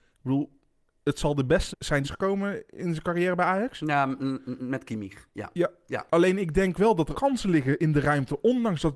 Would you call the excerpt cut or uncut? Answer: cut